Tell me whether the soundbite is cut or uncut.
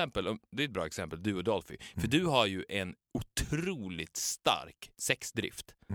uncut